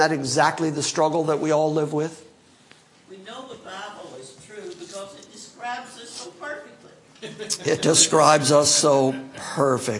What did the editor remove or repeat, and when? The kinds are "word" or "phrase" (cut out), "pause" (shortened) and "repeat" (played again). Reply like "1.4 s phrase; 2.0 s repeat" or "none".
none